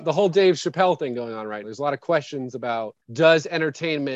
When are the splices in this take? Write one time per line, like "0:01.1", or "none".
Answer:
0:01.6
0:03.0